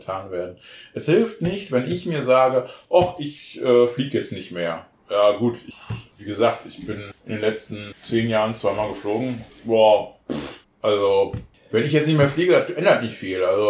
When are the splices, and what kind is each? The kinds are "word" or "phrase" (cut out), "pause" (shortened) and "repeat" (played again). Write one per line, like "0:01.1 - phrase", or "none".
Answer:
none